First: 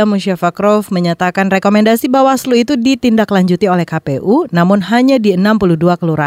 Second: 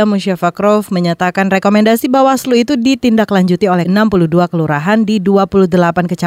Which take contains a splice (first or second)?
second